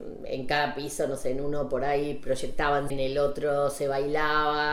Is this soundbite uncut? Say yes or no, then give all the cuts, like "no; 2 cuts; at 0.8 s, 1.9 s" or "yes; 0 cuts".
no; 1 cut; at 2.9 s